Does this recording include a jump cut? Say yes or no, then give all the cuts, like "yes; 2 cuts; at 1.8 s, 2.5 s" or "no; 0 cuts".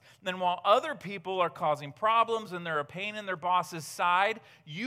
no; 0 cuts